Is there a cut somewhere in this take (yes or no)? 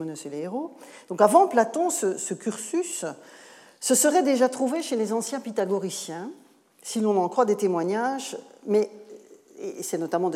no